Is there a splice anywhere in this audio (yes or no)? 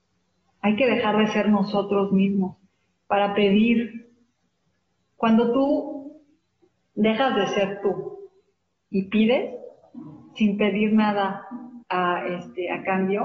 yes